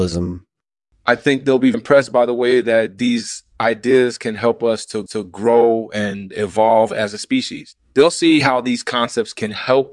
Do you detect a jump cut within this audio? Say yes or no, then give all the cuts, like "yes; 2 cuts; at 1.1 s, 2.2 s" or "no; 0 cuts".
yes; 2 cuts; at 1.7 s, 5.1 s